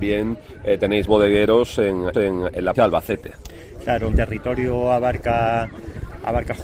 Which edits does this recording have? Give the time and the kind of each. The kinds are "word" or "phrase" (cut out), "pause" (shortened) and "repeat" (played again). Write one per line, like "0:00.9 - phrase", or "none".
0:01.1 - word
0:02.1 - repeat
0:02.7 - word
0:04.1 - word